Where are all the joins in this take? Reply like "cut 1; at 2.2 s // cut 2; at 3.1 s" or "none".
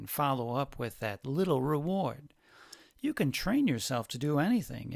none